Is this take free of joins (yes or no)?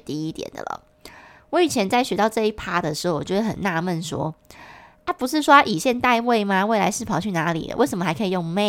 yes